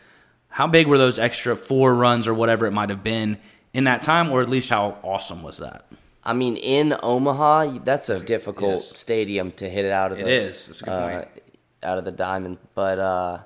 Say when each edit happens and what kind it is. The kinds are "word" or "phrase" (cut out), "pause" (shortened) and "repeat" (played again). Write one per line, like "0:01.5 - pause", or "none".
0:04.7 - word
0:08.2 - word